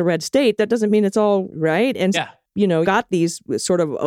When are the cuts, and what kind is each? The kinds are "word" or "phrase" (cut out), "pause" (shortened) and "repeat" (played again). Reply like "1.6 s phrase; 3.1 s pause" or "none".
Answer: 1.5 s word; 2.1 s word; 2.8 s word